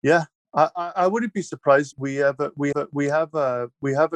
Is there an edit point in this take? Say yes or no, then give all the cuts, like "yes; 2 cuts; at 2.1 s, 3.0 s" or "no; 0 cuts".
yes; 2 cuts; at 1.9 s, 2.7 s